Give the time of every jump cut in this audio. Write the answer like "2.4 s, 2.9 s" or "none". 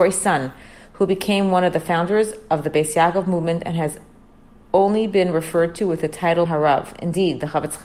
6.5 s